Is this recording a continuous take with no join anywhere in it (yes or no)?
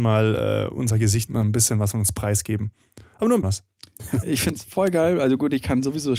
no